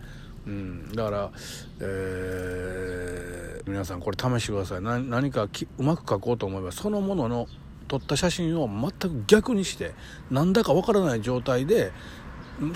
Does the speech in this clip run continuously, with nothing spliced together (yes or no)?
no